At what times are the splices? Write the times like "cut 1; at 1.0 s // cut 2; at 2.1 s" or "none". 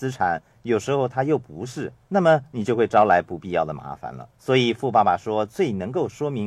cut 1; at 2.0 s // cut 2; at 4.3 s

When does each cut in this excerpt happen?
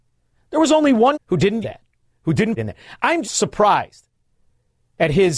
cut 1; at 1.1 s // cut 2; at 1.6 s // cut 3; at 2.6 s // cut 4; at 3.2 s

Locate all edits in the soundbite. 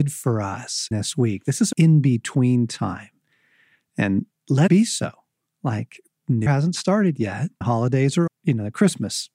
cut 1; at 0.9 s // cut 2; at 1.7 s // cut 3; at 4.3 s // cut 4; at 4.7 s // cut 5; at 6.5 s // cut 6; at 7.6 s // cut 7; at 8.3 s

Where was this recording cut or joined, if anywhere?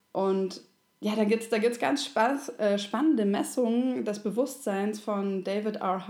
none

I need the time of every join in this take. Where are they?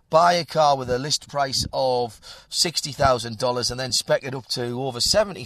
none

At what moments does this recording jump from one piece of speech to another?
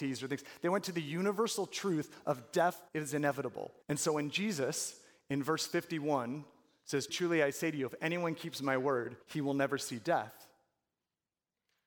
cut 1; at 2.9 s // cut 2; at 3.8 s // cut 3; at 7.1 s // cut 4; at 9.2 s

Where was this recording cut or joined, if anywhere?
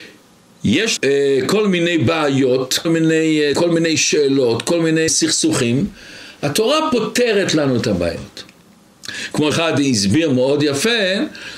cut 1; at 1.0 s // cut 2; at 2.8 s // cut 3; at 3.5 s // cut 4; at 5.1 s // cut 5; at 9.5 s

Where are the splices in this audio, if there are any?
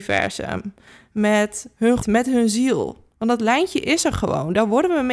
cut 1; at 2.0 s // cut 2; at 3.1 s

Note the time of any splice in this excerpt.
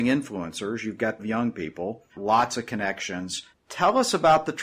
cut 1; at 1.2 s // cut 2; at 2.1 s // cut 3; at 3.5 s

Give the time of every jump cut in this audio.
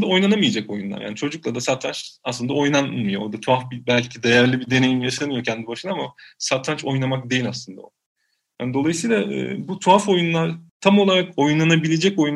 cut 1; at 10.7 s

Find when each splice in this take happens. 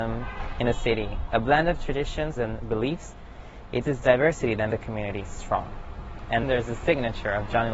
cut 1; at 2.4 s // cut 2; at 3.8 s // cut 3; at 4.7 s // cut 4; at 6.4 s

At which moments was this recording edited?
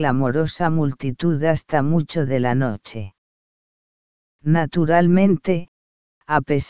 cut 1; at 2.3 s

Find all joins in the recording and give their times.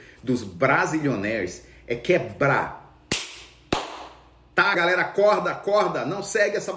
cut 1; at 4.7 s

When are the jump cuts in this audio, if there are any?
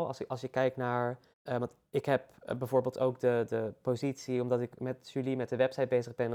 cut 1; at 1.3 s

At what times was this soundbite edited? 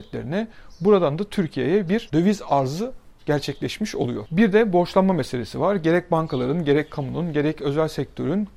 none

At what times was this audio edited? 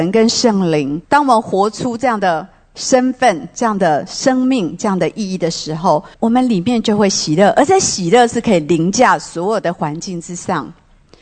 cut 1; at 1.0 s // cut 2; at 6.1 s

